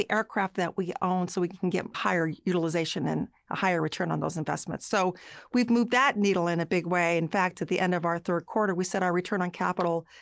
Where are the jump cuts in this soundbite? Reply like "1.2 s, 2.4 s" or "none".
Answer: 1.9 s